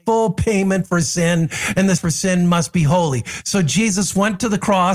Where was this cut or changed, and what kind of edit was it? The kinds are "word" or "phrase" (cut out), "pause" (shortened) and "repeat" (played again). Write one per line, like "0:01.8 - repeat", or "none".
0:02.0 - word